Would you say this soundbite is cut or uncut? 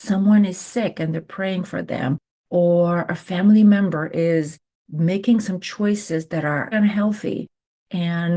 cut